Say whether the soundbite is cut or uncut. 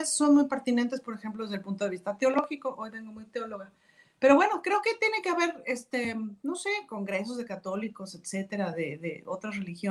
uncut